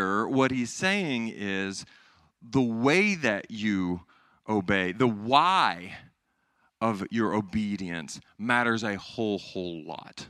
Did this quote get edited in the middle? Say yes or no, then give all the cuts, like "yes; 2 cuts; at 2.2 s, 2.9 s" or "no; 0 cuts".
no; 0 cuts